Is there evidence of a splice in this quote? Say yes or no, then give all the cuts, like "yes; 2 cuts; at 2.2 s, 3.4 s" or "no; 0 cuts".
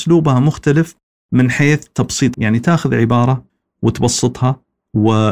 yes; 1 cut; at 2.3 s